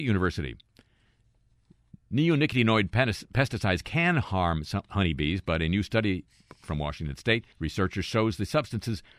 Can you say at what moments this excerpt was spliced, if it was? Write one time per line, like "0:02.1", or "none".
0:07.5

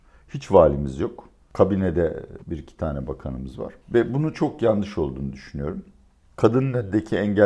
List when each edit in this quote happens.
0:02.4
0:03.8
0:06.2

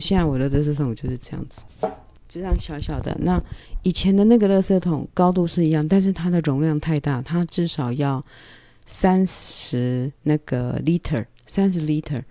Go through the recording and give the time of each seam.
0:10.1

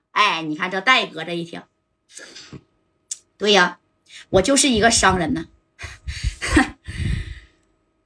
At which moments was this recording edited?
none

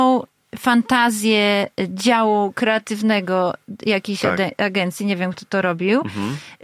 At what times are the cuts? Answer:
none

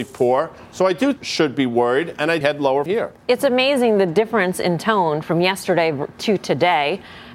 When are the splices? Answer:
0:01.2
0:02.4
0:02.9

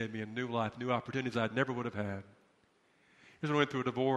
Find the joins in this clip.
none

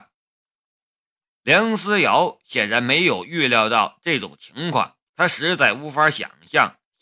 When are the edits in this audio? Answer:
0:05.1

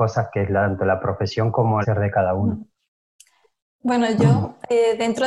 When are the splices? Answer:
0:01.8

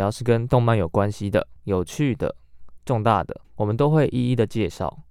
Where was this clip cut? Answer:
0:01.6
0:03.4

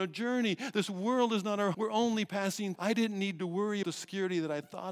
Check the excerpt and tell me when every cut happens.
0:01.7
0:02.8
0:03.8

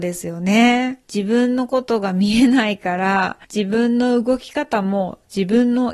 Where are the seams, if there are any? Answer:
0:01.0
0:03.4

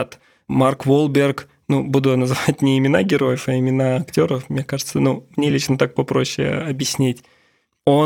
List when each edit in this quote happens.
none

